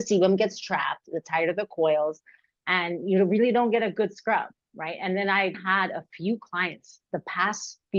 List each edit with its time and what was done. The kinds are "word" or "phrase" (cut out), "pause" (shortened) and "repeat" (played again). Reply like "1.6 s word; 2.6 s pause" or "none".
5.5 s word